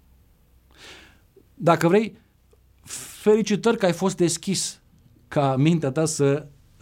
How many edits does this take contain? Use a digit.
0